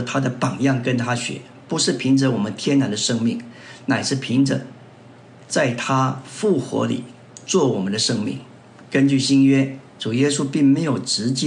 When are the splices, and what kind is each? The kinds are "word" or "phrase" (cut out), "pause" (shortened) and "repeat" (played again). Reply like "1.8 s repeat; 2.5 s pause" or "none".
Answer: none

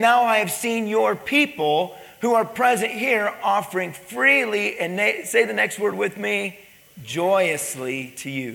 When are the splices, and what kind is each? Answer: none

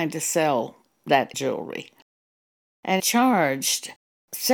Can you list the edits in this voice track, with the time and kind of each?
1.3 s word; 3.0 s word

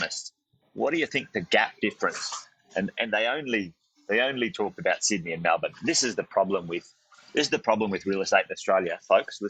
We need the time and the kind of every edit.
none

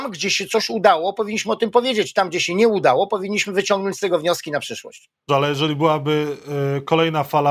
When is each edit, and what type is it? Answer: 5.3 s word

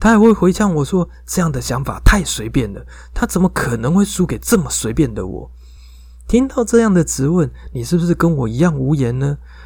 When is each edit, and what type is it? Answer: none

